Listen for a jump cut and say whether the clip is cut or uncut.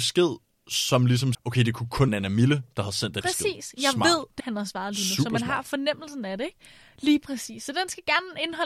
cut